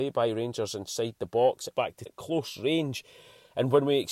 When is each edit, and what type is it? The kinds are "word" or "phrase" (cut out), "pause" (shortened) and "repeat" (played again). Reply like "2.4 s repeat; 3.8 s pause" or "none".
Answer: 1.7 s word; 2.1 s word

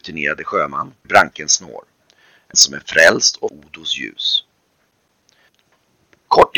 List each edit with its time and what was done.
1.0 s word; 2.5 s word; 3.5 s word

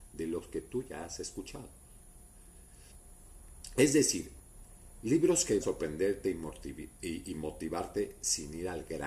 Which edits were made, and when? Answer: 5.6 s word

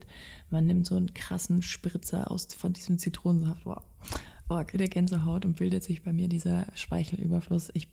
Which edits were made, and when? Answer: 4.7 s phrase

